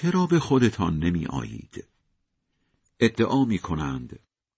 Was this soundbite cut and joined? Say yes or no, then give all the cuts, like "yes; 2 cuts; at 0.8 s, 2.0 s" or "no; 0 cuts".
no; 0 cuts